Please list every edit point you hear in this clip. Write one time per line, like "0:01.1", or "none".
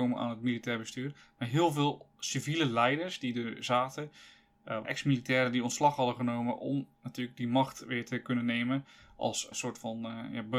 0:04.8
0:09.5